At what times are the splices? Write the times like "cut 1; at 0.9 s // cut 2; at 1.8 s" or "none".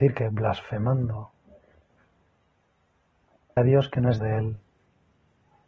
cut 1; at 3.6 s // cut 2; at 4.2 s